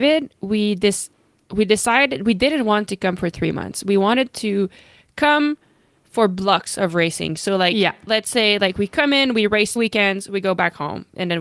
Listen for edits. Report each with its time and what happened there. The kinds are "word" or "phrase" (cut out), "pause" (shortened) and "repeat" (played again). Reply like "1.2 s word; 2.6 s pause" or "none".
9.8 s word